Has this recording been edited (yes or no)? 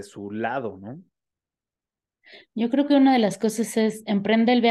no